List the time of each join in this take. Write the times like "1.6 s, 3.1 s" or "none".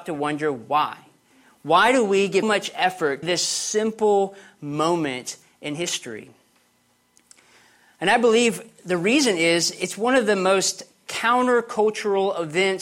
2.4 s, 3.2 s

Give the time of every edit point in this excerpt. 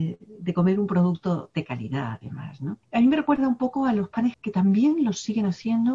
2.8 s, 4.3 s

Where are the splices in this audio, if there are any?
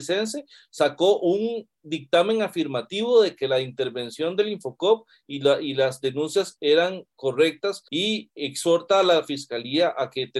7.9 s

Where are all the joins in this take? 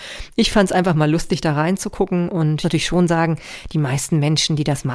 2.6 s

